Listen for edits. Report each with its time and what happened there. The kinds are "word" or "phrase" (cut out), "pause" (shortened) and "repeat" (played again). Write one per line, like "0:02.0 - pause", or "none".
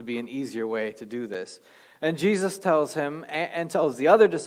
none